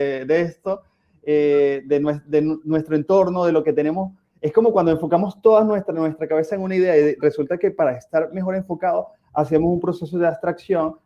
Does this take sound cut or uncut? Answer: uncut